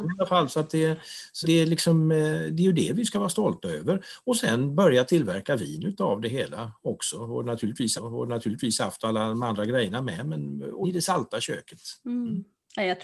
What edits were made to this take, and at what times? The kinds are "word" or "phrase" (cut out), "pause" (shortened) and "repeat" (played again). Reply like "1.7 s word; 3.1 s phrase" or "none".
1.4 s word; 8.0 s repeat; 10.8 s word; 12.0 s pause